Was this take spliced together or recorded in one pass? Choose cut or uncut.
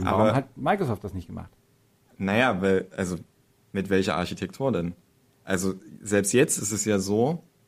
uncut